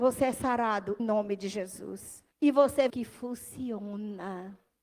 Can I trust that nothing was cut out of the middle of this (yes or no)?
no